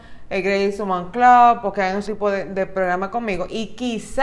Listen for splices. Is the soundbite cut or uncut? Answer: cut